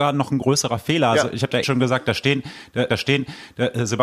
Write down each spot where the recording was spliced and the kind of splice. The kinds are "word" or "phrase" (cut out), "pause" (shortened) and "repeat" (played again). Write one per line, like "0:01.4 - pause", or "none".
0:01.6 - word
0:02.9 - repeat

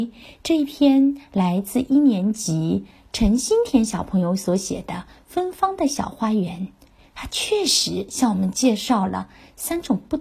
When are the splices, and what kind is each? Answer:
none

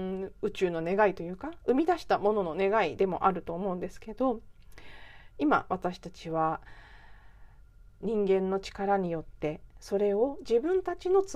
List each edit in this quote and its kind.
0:08.0 - word

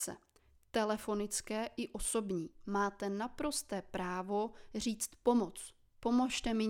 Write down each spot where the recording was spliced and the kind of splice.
none

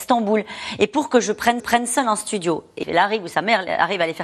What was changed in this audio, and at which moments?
0:01.6 - repeat
0:02.8 - word

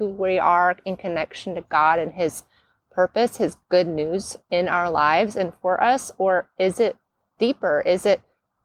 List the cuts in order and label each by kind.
0:04.4 - pause

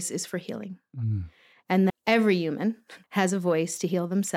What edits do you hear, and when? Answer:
0:01.9 - word
0:03.0 - pause

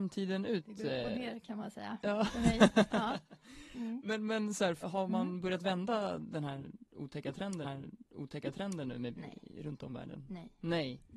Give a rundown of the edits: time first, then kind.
0:04.8 - word
0:07.6 - repeat
0:09.1 - word

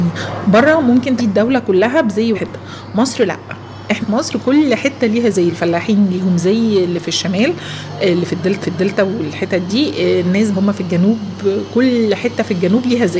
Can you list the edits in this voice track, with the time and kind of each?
0:01.2 - word
0:02.3 - word
0:04.0 - word
0:08.6 - repeat
0:10.5 - phrase

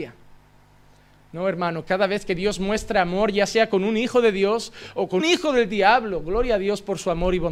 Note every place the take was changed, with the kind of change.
0:05.2 - word

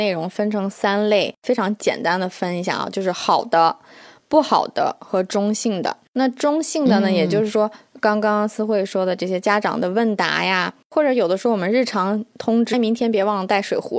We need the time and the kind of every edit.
0:12.7 - word

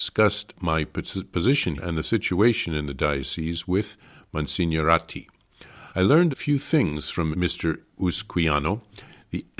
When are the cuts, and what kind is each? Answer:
0:01.8 - word
0:05.9 - pause
0:06.3 - word
0:07.3 - word

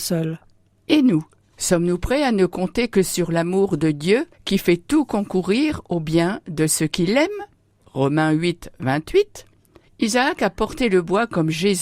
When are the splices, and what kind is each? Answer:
none

